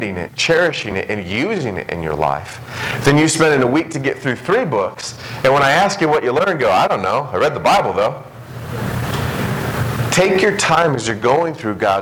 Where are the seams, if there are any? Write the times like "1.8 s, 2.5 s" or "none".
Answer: none